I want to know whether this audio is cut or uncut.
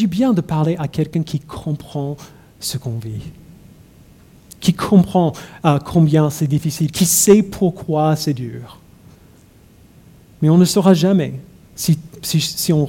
uncut